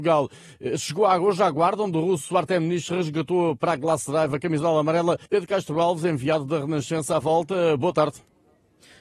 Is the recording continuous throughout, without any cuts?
no; 1 cut; at 5.3 s

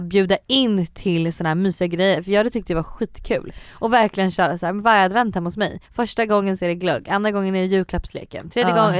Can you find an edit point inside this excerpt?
yes; 1 cut; at 5.8 s

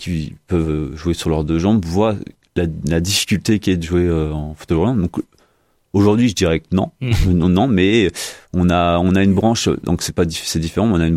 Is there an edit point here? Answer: no; 0 cuts

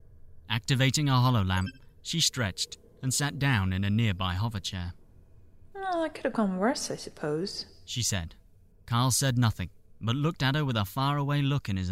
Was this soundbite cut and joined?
no; 0 cuts

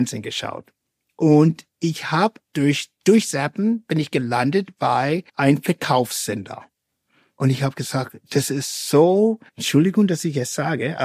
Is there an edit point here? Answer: yes; 2 cuts; at 5.3 s, 9.5 s

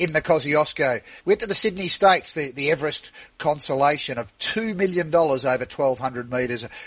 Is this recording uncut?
no; 1 cut; at 1.2 s

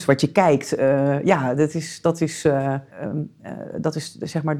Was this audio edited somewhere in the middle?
yes; 1 cut; at 2.9 s

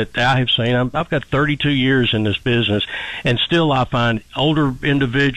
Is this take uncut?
yes; 0 cuts

